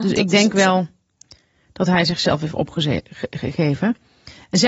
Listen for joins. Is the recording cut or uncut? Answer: uncut